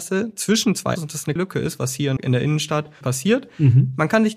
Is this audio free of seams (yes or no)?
no